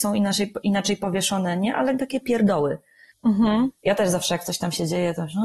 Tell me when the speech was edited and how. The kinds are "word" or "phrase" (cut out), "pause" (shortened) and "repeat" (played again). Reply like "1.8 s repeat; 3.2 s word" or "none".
2.0 s word